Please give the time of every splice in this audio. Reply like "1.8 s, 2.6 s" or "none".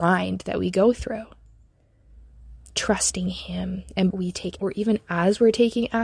2.6 s, 4.1 s, 4.6 s

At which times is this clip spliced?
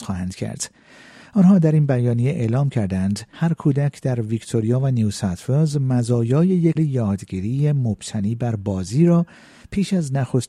3.3 s, 6.8 s

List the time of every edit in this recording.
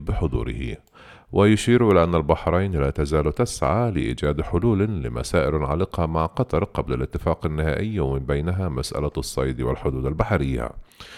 none

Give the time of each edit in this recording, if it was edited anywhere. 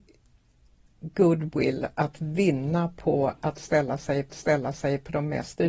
4.3 s

